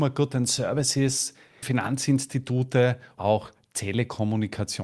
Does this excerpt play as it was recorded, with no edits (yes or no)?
no